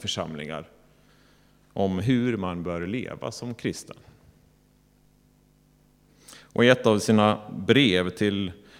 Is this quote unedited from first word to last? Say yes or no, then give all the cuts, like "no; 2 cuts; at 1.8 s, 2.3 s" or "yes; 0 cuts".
yes; 0 cuts